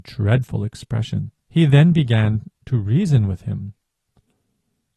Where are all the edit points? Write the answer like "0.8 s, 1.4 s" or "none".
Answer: 1.4 s